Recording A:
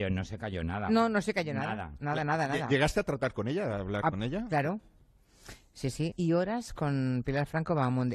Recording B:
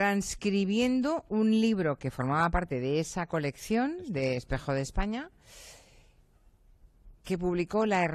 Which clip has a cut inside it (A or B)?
A